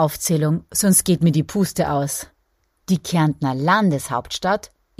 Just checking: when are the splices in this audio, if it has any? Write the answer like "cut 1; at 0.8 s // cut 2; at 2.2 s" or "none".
none